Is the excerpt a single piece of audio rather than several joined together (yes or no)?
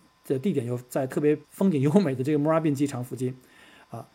no